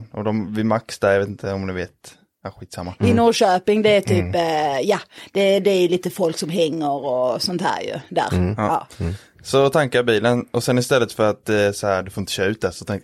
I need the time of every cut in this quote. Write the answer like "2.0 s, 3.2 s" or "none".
none